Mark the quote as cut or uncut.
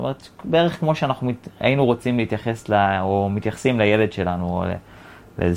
uncut